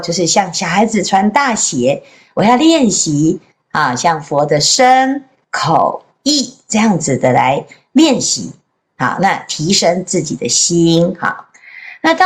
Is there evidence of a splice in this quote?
no; 0 cuts

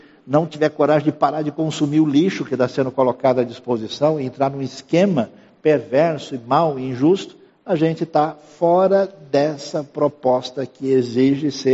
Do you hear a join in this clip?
yes; 1 cut; at 7.5 s

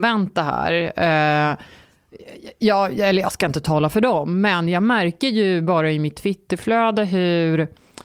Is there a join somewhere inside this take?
no; 0 cuts

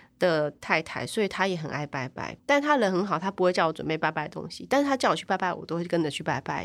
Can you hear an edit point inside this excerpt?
yes; 1 cut; at 2.4 s

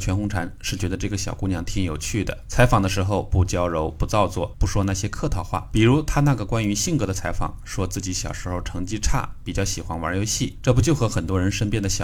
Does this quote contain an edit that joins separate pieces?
yes; 1 cut; at 4.5 s

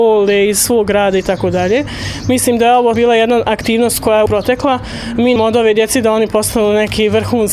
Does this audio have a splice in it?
yes; 3 cuts; at 2.9 s, 4.3 s, 5.4 s

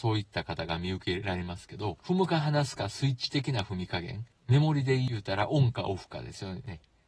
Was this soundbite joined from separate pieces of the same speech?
yes; 1 cut; at 4.4 s

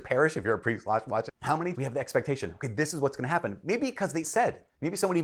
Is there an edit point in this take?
yes; 3 cuts; at 1.3 s, 1.7 s, 4.2 s

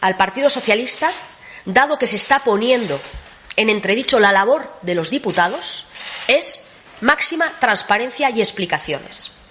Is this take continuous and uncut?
yes; 0 cuts

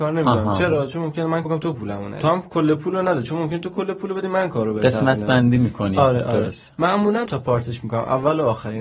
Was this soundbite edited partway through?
yes; 2 cuts; at 1.5 s, 7.3 s

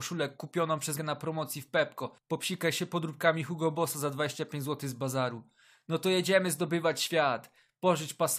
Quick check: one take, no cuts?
no; 1 cut; at 1.0 s

